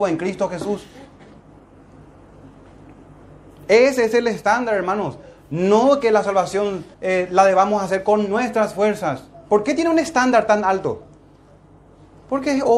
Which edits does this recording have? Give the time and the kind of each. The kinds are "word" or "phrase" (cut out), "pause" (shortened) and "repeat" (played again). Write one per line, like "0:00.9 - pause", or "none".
0:06.9 - pause